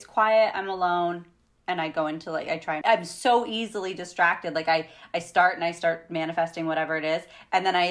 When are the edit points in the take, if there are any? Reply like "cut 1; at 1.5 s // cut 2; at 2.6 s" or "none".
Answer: cut 1; at 2.8 s